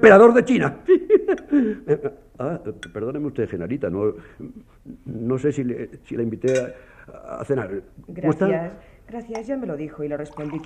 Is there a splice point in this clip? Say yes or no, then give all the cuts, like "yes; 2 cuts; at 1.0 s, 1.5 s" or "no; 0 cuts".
no; 0 cuts